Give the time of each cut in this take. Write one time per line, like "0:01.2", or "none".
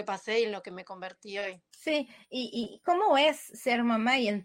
0:01.7